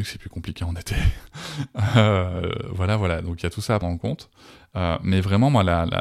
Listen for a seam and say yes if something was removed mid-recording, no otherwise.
yes